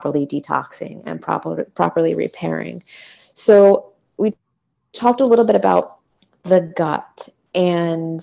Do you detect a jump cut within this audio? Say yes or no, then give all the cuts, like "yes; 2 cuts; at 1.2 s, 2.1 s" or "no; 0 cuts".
no; 0 cuts